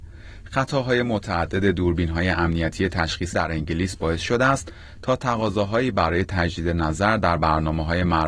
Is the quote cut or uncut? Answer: cut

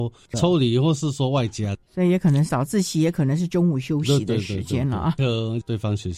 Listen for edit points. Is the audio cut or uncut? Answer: cut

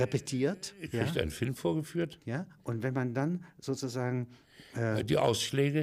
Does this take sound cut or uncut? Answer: uncut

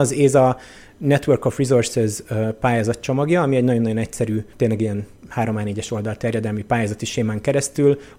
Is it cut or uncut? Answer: uncut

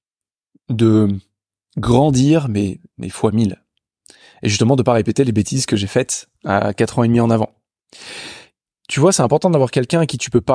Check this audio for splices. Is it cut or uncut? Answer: uncut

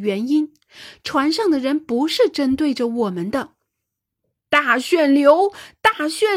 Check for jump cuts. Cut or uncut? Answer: uncut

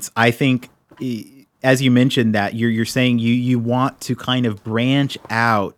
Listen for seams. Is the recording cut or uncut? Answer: uncut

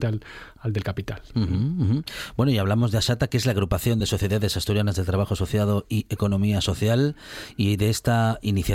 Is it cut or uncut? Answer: uncut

